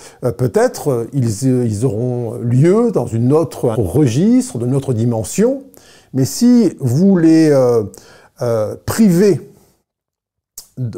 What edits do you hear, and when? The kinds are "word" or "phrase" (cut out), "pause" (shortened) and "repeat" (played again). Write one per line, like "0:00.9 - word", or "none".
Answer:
0:03.7 - word